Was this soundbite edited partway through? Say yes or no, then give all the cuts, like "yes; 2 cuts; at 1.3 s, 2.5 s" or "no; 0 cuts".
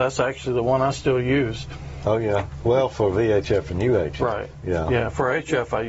no; 0 cuts